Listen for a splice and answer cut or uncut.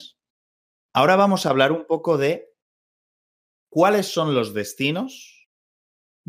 uncut